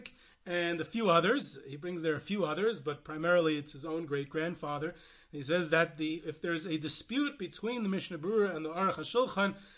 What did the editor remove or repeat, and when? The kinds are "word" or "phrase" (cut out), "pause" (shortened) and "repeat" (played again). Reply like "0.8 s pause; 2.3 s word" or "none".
none